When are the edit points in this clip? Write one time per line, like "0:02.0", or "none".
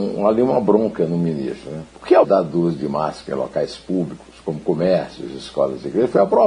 0:01.9
0:02.2